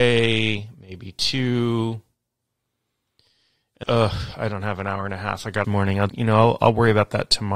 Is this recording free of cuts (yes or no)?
no